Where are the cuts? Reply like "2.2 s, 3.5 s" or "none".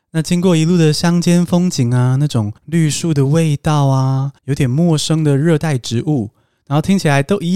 2.6 s, 4.4 s